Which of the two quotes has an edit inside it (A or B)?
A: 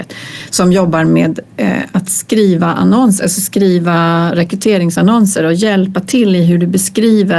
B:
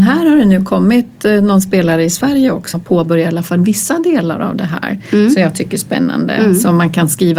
B